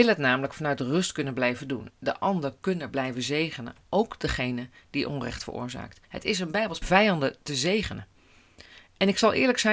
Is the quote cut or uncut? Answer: cut